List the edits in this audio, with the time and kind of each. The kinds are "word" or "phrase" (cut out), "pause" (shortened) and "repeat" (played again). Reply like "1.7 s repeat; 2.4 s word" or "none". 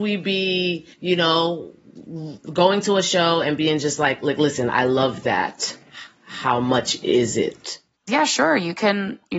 0.9 s pause